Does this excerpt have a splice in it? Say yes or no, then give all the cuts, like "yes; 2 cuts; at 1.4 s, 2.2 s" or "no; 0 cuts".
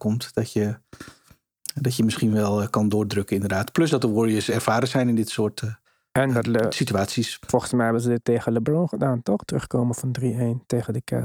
yes; 1 cut; at 5.8 s